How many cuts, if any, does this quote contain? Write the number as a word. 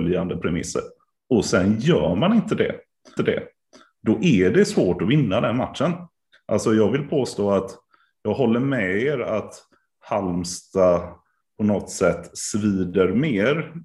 one